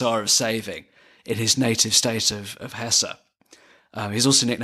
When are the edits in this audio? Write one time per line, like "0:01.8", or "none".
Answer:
none